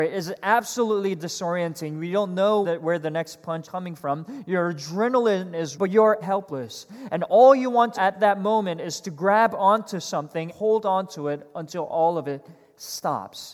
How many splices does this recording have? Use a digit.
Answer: 6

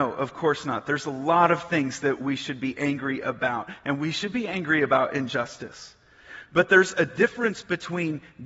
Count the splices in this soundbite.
0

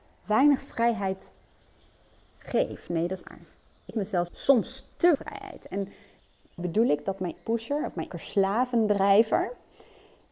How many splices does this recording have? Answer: 7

